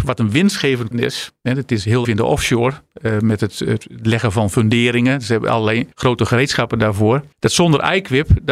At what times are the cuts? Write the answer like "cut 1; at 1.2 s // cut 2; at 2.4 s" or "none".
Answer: cut 1; at 0.9 s // cut 2; at 2.0 s // cut 3; at 5.9 s // cut 4; at 7.3 s